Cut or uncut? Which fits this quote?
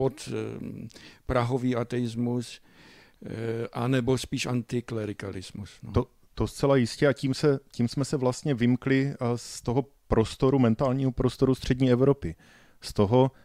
uncut